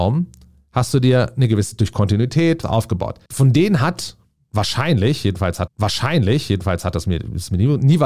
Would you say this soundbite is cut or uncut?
cut